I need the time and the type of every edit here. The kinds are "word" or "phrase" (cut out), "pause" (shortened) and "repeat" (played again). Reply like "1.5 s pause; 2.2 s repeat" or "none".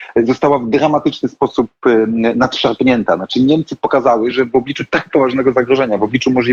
none

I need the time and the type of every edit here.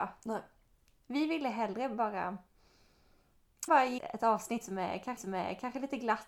3.7 s phrase; 4.0 s word; 5.2 s repeat

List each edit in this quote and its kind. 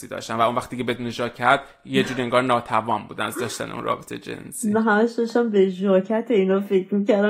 none

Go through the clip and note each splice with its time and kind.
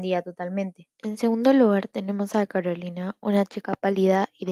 0.9 s pause

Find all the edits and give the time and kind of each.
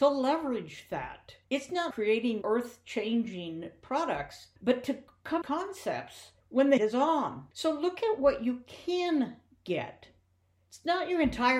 1.4 s pause; 1.9 s phrase; 2.4 s word; 4.6 s pause; 5.4 s phrase; 6.4 s pause; 6.8 s word; 7.5 s pause

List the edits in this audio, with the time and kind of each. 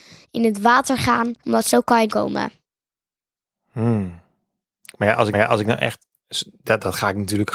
1.4 s pause; 2.1 s word; 5.3 s repeat

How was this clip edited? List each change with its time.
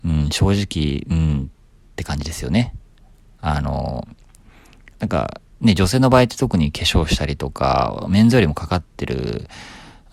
none

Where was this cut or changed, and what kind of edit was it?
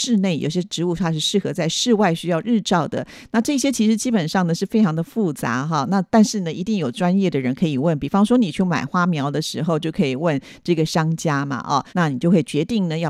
11.9 s pause

